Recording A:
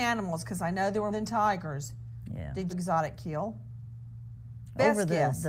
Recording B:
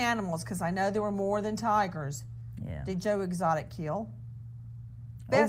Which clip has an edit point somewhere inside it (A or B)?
A